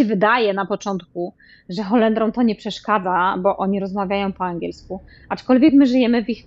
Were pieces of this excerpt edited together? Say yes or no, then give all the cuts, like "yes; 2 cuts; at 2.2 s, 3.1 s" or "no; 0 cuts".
no; 0 cuts